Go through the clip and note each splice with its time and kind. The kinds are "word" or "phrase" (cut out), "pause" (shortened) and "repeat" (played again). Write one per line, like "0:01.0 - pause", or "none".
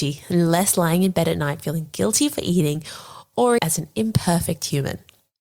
0:03.6 - word